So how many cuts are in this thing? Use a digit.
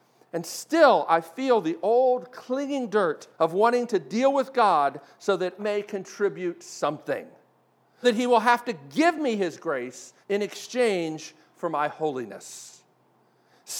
4